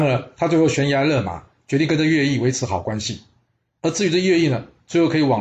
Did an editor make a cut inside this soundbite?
no; 0 cuts

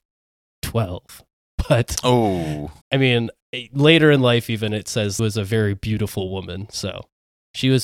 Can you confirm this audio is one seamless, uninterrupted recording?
no; 2 cuts; at 2.8 s, 5.2 s

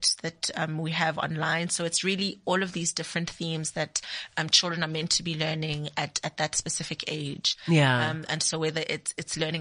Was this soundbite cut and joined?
no; 0 cuts

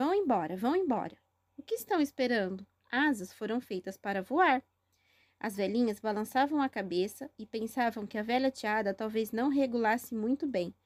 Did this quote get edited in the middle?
no; 0 cuts

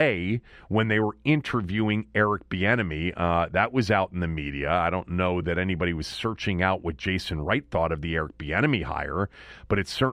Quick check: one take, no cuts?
yes; 0 cuts

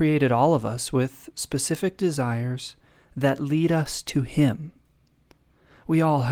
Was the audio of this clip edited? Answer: no; 0 cuts

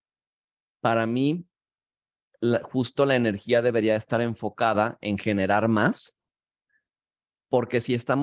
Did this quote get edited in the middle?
no; 0 cuts

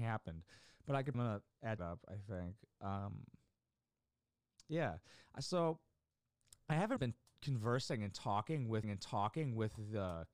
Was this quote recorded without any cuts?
no; 4 cuts; at 1.1 s, 1.8 s, 7.0 s, 8.8 s

